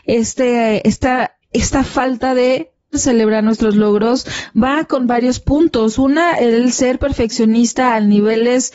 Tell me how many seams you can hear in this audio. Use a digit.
2